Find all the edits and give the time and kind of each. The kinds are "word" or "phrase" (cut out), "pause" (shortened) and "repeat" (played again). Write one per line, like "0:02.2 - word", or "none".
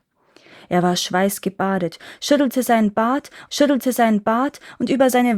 0:03.5 - repeat

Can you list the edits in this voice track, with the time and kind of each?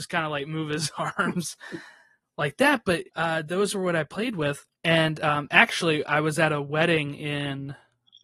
0:03.1 - pause
0:04.7 - pause

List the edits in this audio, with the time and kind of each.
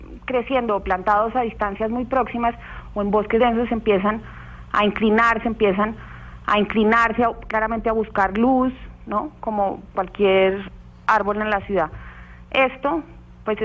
0:03.4 - word
0:05.4 - repeat
0:09.9 - word

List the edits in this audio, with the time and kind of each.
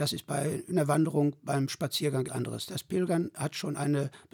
0:02.3 - word

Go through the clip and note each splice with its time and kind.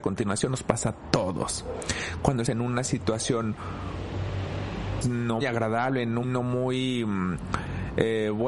0:02.5 - word
0:05.0 - word
0:05.4 - word
0:06.2 - word

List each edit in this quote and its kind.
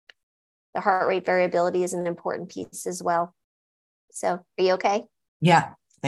none

